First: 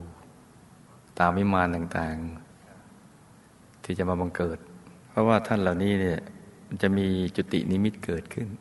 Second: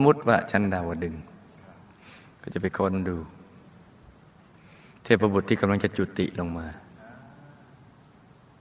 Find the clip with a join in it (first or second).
first